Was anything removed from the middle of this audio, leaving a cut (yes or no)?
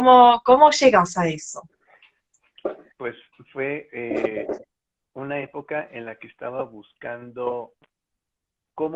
no